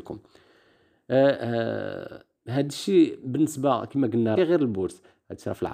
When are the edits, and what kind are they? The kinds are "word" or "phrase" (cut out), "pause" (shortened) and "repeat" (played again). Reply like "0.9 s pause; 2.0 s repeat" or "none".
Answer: 4.4 s word